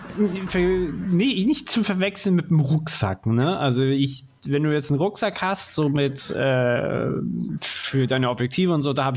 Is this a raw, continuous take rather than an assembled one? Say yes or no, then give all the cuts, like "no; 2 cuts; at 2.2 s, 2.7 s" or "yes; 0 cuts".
yes; 0 cuts